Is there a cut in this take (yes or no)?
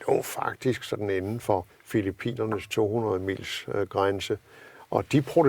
yes